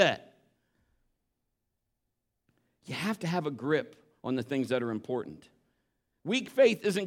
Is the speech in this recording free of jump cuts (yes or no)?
yes